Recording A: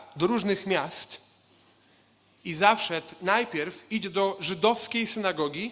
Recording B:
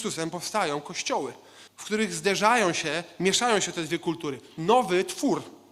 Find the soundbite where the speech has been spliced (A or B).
B